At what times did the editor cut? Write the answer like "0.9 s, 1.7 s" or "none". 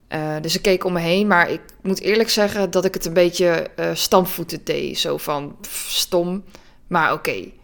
6.6 s